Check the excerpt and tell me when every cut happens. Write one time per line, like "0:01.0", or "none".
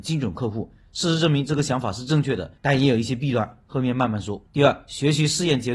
0:02.6
0:04.5